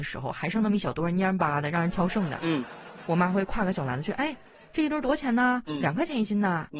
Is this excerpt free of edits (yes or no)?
yes